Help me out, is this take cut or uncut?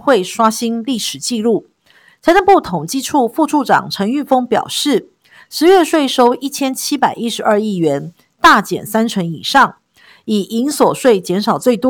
uncut